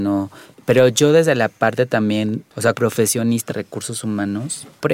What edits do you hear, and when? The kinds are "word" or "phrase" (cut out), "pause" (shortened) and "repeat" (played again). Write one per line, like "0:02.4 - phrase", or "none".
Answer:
0:02.7 - word
0:03.5 - word

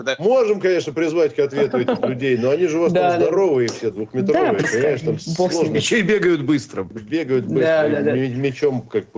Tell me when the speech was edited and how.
none

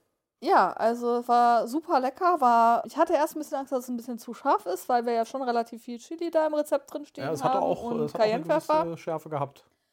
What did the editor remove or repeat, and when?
0:02.8 - word

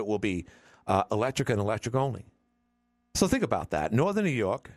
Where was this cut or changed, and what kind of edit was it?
none

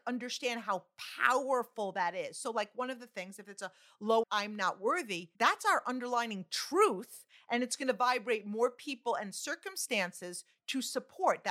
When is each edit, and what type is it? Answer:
0:04.2 - phrase
0:05.3 - pause

